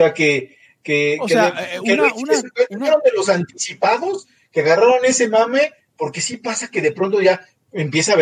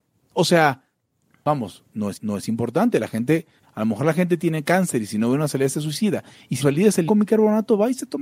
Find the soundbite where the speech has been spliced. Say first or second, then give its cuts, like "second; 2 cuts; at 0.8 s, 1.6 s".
second; 3 cuts; at 2.1 s, 6.6 s, 7.1 s